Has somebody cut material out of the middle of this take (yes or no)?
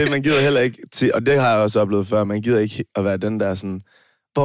no